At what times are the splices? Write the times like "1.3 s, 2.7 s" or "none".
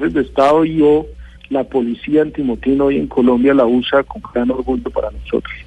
none